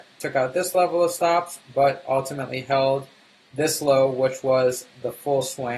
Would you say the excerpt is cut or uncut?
uncut